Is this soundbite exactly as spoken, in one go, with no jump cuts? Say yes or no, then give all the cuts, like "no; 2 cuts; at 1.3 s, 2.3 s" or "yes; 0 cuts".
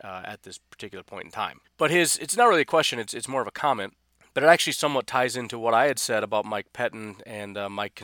no; 1 cut; at 1.7 s